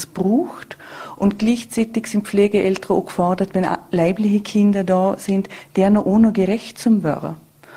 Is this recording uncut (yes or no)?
yes